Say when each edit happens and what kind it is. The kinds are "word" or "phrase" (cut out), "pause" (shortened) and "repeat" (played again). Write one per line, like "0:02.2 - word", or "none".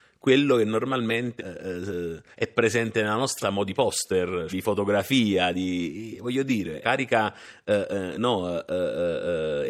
0:01.4 - word
0:02.3 - pause
0:03.4 - word
0:04.5 - word
0:06.8 - phrase